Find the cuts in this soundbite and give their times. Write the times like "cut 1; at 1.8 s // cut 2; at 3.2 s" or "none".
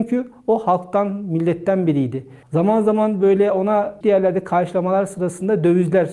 cut 1; at 2.4 s // cut 2; at 4.0 s